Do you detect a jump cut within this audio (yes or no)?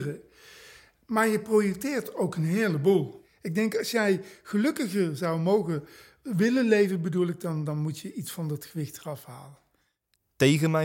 no